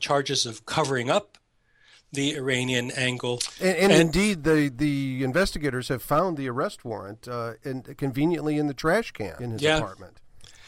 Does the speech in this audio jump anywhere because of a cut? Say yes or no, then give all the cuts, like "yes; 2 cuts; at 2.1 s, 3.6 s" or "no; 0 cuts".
no; 0 cuts